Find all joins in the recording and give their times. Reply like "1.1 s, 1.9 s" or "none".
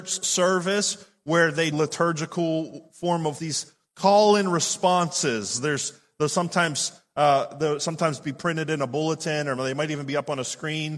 1.7 s, 3.4 s